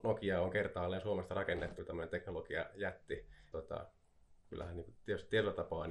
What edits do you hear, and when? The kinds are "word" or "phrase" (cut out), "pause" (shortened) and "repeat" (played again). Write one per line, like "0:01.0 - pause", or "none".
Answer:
0:01.8 - word
0:03.5 - word